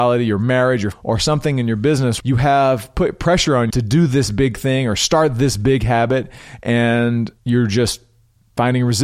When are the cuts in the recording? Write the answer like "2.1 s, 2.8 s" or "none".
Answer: 0.9 s, 2.2 s, 3.7 s, 7.4 s